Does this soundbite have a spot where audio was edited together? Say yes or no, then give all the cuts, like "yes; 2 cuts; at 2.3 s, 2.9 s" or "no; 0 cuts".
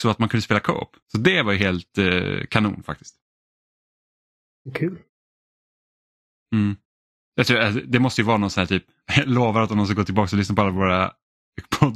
yes; 1 cut; at 1.0 s